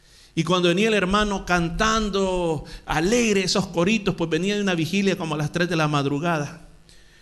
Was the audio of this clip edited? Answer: no; 0 cuts

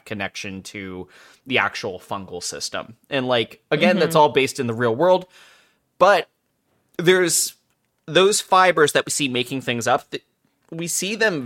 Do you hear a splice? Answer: no; 0 cuts

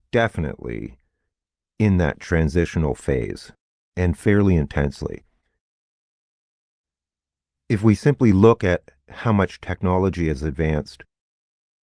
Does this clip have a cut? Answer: no; 0 cuts

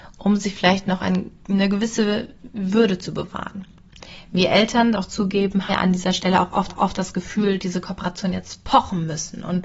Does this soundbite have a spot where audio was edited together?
yes; 5 cuts; at 1.4 s, 4.9 s, 5.7 s, 6.7 s, 7.6 s

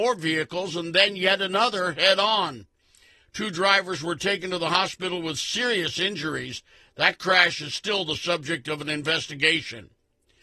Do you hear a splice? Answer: no; 0 cuts

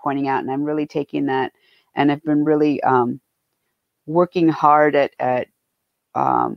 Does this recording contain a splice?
no; 0 cuts

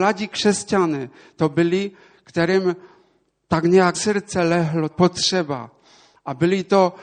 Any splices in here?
yes; 2 cuts; at 3.9 s, 4.9 s

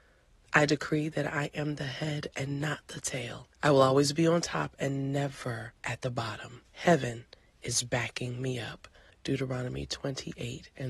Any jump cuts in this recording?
yes; 4 cuts; at 3.5 s, 5.8 s, 6.7 s, 9.1 s

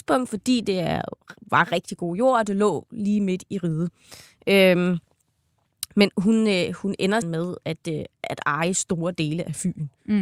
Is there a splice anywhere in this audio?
yes; 1 cut; at 7.2 s

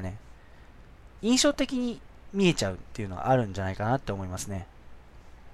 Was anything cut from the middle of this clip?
yes; 1 cut; at 1.1 s

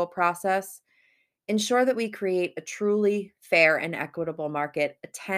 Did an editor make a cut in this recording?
no; 0 cuts

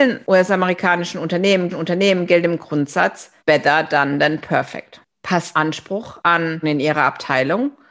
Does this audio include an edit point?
yes; 4 cuts; at 1.7 s, 3.4 s, 5.5 s, 6.6 s

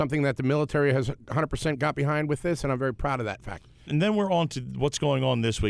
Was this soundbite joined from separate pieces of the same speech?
no; 0 cuts

